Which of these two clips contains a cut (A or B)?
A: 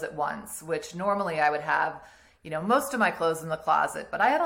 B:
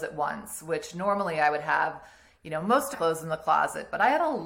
B